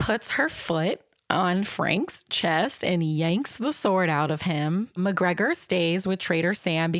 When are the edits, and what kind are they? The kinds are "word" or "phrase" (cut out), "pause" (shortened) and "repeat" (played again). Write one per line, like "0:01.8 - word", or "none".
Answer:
none